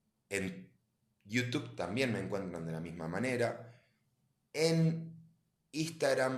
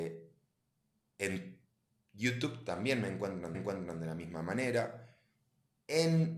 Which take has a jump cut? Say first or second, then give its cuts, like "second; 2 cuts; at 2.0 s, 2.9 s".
second; 1 cut; at 3.5 s